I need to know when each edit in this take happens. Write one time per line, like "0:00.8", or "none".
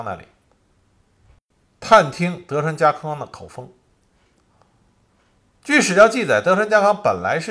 none